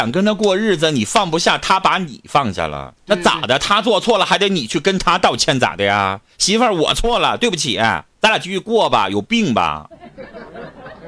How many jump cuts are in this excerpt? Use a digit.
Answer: 1